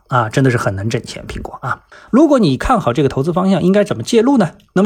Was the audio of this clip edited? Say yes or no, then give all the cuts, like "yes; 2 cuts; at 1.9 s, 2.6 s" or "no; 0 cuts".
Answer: yes; 1 cut; at 2.1 s